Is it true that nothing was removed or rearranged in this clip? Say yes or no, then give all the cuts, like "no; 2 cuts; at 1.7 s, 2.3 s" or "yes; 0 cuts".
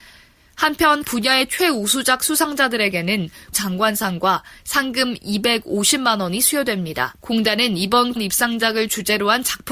no; 3 cuts; at 1.0 s, 3.5 s, 8.2 s